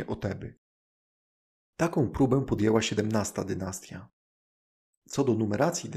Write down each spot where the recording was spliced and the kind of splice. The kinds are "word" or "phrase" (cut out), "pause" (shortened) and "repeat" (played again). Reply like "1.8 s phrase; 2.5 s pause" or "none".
none